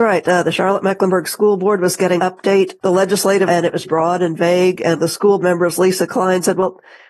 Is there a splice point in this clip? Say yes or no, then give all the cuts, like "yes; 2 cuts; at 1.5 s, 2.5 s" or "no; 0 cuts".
yes; 6 cuts; at 2.2 s, 2.8 s, 3.5 s, 3.8 s, 5.0 s, 5.4 s